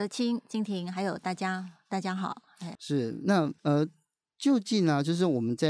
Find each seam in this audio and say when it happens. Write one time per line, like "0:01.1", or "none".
0:02.7
0:03.6